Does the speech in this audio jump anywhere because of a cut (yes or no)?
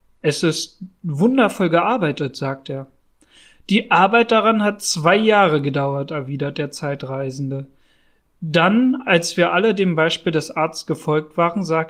no